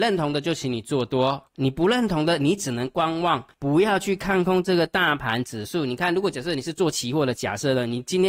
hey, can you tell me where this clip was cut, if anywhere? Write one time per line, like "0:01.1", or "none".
0:01.5
0:03.5